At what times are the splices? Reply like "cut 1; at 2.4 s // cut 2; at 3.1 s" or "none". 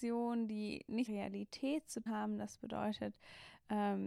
cut 1; at 1.1 s // cut 2; at 2.1 s